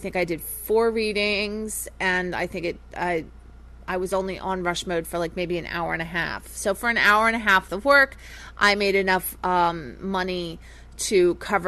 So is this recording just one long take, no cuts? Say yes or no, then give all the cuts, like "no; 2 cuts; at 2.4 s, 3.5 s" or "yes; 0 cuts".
no; 1 cut; at 7.7 s